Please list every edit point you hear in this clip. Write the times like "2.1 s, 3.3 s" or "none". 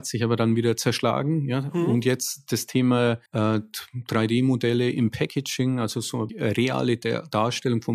3.3 s, 6.3 s